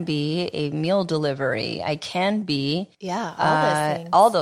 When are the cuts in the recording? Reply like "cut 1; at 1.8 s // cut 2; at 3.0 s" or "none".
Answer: cut 1; at 2.9 s